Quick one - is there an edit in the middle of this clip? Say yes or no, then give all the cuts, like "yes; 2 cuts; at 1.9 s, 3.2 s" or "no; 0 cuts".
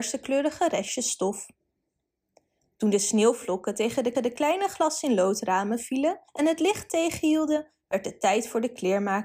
yes; 2 cuts; at 4.1 s, 6.3 s